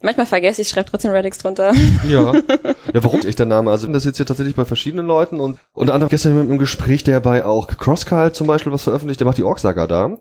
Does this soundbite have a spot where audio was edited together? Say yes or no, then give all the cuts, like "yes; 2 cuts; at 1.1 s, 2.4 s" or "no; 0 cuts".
yes; 3 cuts; at 3.2 s, 3.9 s, 6.1 s